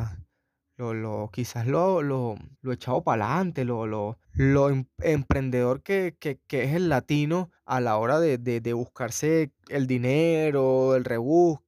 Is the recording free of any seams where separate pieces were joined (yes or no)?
no